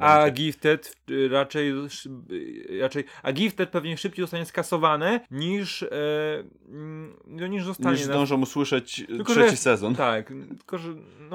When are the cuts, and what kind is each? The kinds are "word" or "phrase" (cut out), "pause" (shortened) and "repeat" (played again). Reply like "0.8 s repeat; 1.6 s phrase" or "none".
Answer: 5.3 s pause